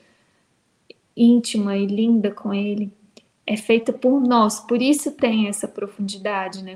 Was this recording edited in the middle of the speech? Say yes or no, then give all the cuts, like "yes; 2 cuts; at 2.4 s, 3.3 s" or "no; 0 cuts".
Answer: no; 0 cuts